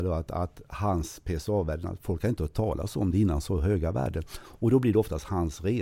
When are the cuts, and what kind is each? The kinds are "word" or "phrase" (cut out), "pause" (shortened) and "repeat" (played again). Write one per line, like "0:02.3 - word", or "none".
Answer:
none